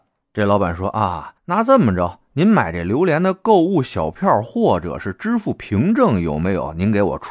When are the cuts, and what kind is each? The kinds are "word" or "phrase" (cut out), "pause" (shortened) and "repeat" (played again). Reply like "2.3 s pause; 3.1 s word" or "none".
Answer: 1.4 s pause

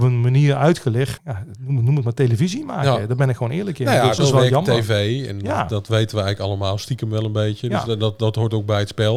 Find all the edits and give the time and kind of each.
1.2 s word; 4.2 s phrase

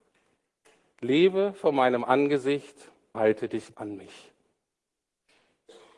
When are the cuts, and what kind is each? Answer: 3.1 s word; 3.7 s word

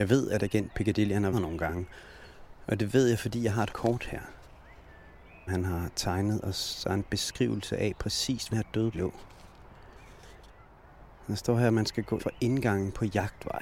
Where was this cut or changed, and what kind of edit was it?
1.3 s word; 3.7 s word; 5.5 s word; 8.5 s word; 8.9 s word; 12.2 s word

